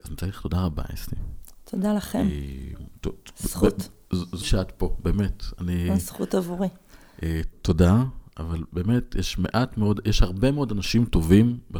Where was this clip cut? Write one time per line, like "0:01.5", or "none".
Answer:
0:04.4
0:07.5